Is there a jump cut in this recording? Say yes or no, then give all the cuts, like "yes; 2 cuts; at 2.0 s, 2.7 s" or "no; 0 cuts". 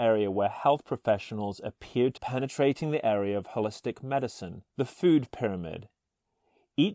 yes; 2 cuts; at 2.2 s, 4.7 s